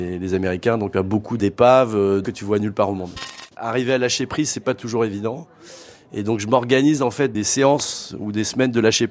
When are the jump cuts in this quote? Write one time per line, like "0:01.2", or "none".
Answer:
none